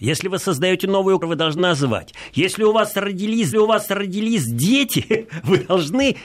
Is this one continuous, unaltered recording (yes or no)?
no